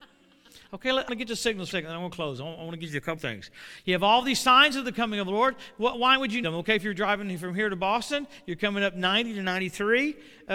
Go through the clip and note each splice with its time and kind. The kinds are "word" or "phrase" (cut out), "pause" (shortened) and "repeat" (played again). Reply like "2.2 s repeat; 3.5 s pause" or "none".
1.1 s word; 1.7 s word; 3.2 s word; 6.4 s word